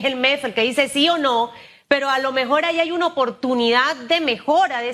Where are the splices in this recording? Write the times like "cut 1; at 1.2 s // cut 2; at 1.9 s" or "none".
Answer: none